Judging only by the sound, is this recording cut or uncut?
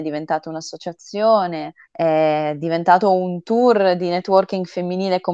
cut